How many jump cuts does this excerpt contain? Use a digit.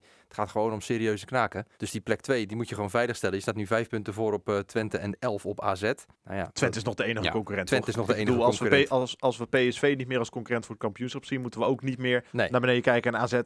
4